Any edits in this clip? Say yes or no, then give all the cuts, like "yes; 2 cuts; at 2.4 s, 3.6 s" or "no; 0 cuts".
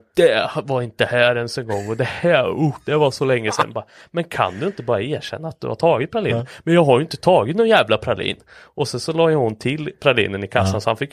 no; 0 cuts